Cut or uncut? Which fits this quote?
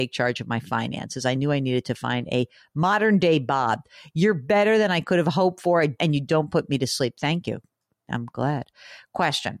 uncut